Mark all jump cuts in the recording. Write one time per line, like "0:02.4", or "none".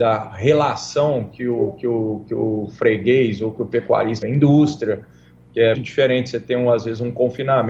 0:04.2
0:05.7